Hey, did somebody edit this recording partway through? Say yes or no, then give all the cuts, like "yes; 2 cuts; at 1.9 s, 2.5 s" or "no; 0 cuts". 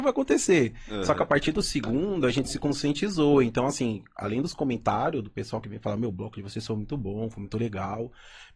no; 0 cuts